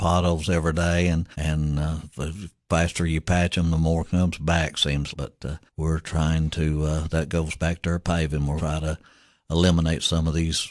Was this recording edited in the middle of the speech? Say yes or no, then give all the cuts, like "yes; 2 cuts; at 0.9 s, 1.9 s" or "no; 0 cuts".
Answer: yes; 4 cuts; at 1.3 s, 5.1 s, 5.7 s, 8.6 s